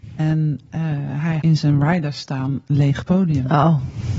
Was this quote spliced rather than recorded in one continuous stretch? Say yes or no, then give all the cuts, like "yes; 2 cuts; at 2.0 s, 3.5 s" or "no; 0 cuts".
yes; 1 cut; at 1.4 s